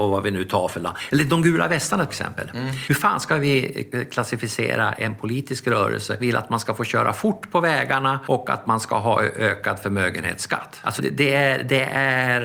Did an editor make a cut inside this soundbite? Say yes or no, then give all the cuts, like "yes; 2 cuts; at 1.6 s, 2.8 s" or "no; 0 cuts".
yes; 3 cuts; at 2.1 s, 6.2 s, 11.0 s